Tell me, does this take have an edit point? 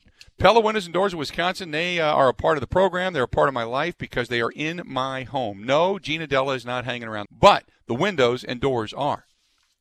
yes; 1 cut; at 7.3 s

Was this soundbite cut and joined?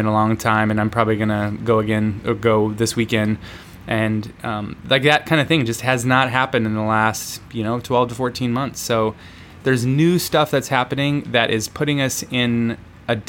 no; 0 cuts

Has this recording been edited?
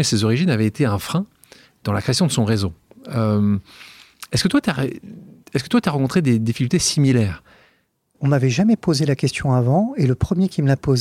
no; 0 cuts

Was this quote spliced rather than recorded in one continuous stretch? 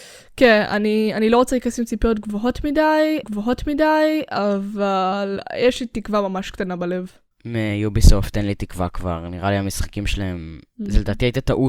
yes; 2 cuts; at 3.2 s, 7.3 s

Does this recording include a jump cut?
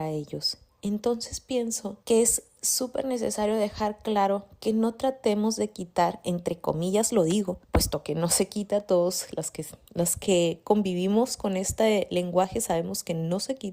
yes; 2 cuts; at 2.0 s, 7.6 s

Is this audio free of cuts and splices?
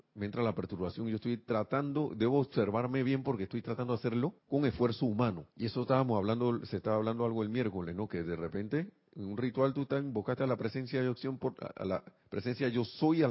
no; 2 cuts; at 4.4 s, 5.5 s

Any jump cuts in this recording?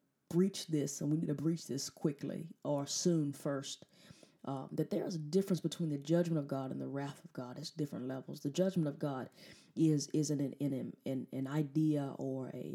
no; 0 cuts

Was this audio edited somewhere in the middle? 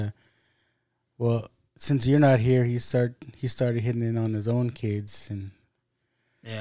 no; 0 cuts

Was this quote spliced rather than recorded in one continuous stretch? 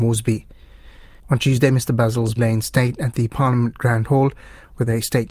yes; 1 cut; at 2.4 s

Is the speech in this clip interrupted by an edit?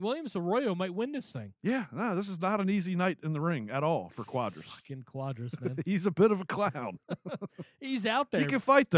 yes; 1 cut; at 7.0 s

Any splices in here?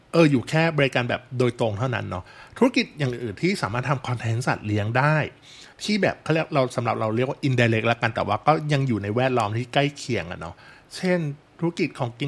yes; 1 cut; at 5.7 s

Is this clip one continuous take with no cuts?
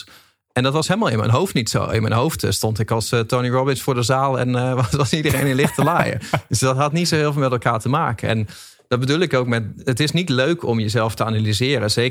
yes; 0 cuts

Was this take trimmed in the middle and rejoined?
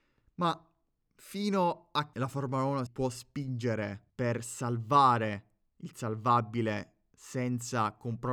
yes; 3 cuts; at 2.1 s, 2.9 s, 4.1 s

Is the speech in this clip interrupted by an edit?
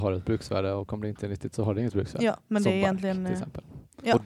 no; 0 cuts

